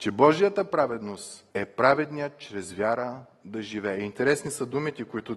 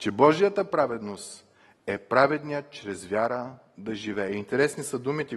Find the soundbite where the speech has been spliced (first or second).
first